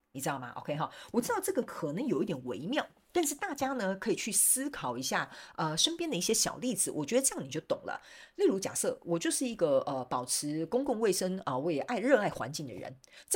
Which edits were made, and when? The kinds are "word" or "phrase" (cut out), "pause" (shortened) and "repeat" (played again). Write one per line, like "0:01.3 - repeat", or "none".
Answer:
none